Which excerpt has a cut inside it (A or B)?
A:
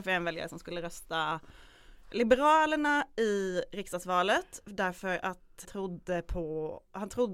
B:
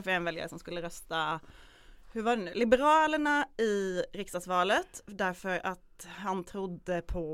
A